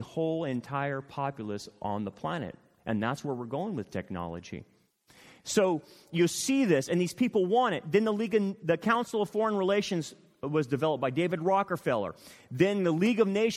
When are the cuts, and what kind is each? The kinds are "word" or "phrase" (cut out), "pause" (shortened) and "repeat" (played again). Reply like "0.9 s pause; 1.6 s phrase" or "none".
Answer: none